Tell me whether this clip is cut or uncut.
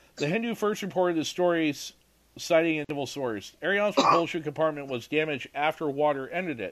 uncut